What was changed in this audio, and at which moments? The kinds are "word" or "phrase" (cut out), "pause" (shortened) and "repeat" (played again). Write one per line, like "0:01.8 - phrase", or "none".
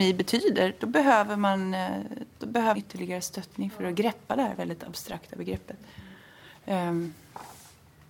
0:02.7 - word

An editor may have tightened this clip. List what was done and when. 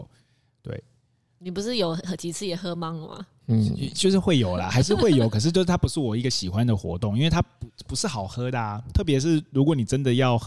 none

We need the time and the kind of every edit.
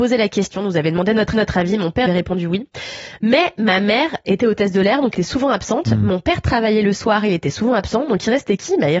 0:01.3 - repeat
0:02.1 - phrase
0:05.1 - word

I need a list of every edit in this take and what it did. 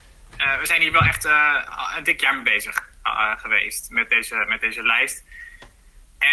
none

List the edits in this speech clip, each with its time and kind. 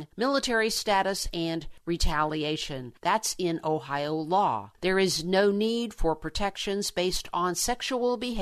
none

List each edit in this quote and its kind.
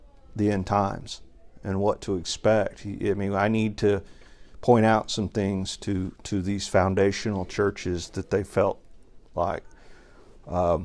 none

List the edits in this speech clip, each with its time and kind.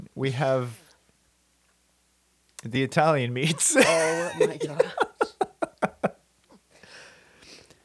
none

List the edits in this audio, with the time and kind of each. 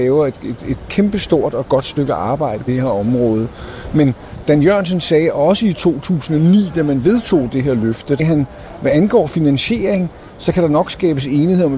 0:02.7 - word
0:08.2 - word

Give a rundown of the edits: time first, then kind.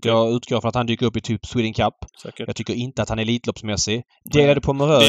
none

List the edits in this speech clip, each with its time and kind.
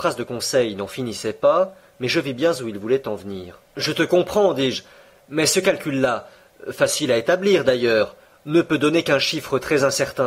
0:03.7 - pause

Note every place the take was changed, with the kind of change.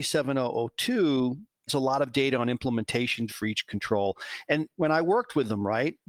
0:01.7 - word
0:03.3 - word

